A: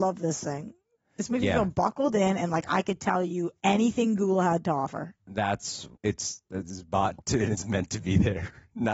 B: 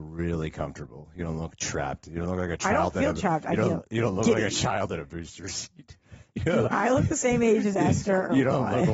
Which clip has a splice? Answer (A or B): A